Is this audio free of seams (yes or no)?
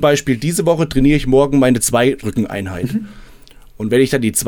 no